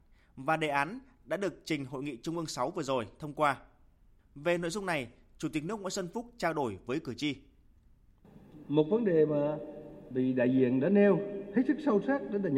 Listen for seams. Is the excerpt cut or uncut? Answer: uncut